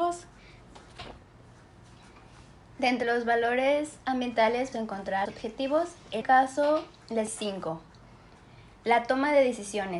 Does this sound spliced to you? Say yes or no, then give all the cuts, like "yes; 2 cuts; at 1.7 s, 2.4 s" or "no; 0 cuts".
yes; 5 cuts; at 3.0 s, 4.7 s, 5.3 s, 6.2 s, 7.3 s